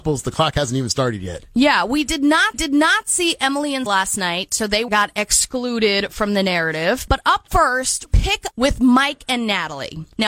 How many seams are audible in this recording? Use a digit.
5